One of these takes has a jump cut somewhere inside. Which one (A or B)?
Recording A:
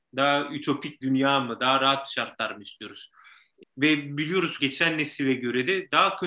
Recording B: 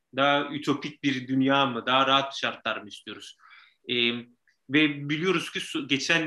A